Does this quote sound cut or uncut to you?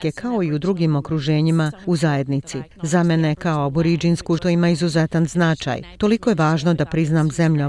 cut